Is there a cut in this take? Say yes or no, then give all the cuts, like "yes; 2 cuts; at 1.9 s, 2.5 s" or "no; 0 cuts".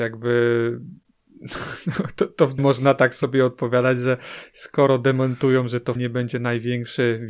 yes; 2 cuts; at 2.6 s, 6.0 s